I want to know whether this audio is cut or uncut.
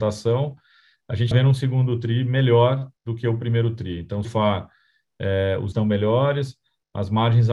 cut